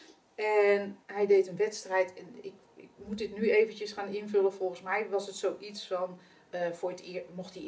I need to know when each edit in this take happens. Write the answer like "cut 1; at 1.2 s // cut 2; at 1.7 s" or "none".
cut 1; at 1.0 s